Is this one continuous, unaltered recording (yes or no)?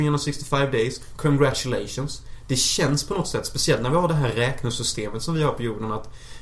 yes